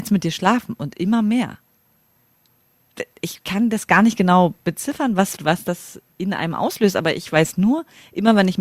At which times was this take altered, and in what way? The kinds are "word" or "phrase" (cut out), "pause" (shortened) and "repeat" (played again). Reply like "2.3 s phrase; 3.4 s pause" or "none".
5.4 s word